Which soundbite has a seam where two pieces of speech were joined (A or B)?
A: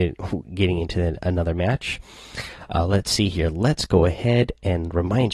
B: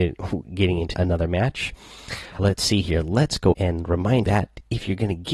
B